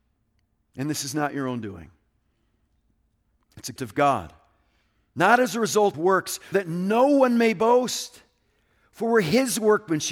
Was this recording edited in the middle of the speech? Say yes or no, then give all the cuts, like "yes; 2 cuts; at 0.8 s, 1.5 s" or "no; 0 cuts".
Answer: yes; 3 cuts; at 3.8 s, 5.9 s, 6.5 s